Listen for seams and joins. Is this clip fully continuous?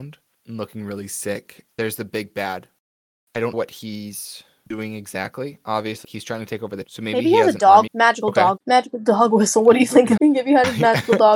no; 7 cuts; at 1.7 s, 3.5 s, 6.0 s, 6.8 s, 7.9 s, 8.6 s, 10.2 s

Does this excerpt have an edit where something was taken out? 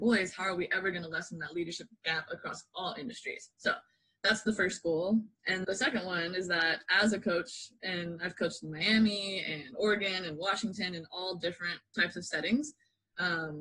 yes; 1 cut; at 5.6 s

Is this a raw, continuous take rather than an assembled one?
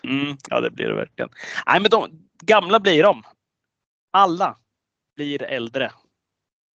yes; 0 cuts

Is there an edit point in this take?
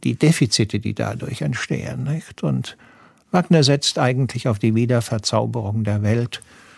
no; 0 cuts

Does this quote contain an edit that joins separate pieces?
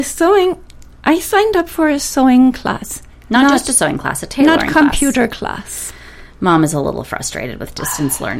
no; 0 cuts

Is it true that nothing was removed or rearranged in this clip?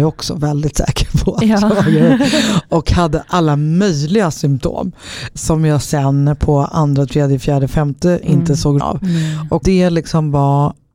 no; 4 cuts; at 5.4 s, 8.2 s, 8.8 s, 9.6 s

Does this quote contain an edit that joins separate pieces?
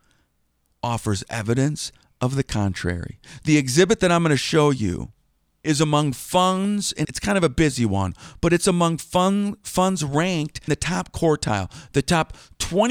yes; 2 cuts; at 7.0 s, 10.7 s

